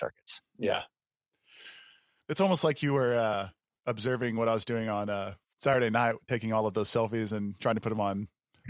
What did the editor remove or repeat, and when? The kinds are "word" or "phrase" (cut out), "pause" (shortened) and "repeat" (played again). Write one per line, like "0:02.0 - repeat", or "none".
none